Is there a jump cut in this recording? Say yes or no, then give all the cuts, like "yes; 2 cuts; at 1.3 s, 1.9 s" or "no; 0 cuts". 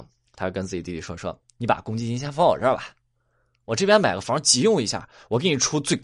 no; 0 cuts